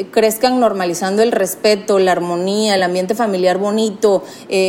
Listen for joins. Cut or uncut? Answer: uncut